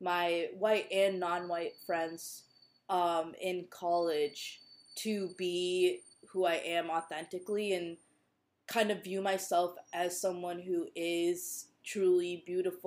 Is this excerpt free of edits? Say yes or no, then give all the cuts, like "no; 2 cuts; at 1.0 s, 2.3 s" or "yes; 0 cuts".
yes; 0 cuts